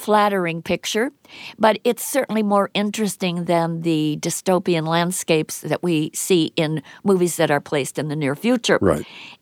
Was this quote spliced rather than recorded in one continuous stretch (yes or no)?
no